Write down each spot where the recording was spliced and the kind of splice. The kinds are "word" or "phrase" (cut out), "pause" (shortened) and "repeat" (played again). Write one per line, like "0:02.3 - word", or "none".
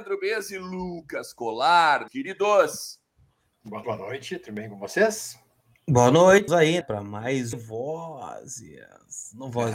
0:02.1 - word
0:03.8 - word
0:05.6 - pause
0:06.5 - word
0:06.8 - word
0:07.5 - phrase

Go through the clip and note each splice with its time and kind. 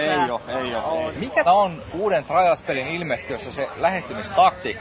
0:01.5 - word

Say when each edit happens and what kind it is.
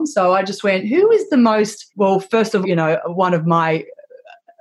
0:01.9 - pause
0:02.6 - word

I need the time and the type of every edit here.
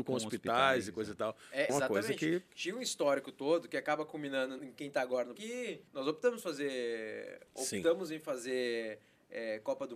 0:01.7 - phrase
0:04.6 - word
0:05.4 - word
0:05.9 - pause
0:07.5 - word

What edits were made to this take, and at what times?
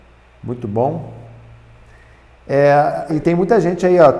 0:03.1 - word

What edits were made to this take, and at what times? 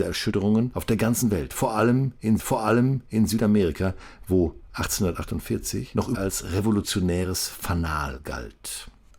0:02.4 - repeat
0:06.1 - word

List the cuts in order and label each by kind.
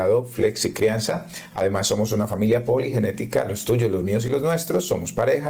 none

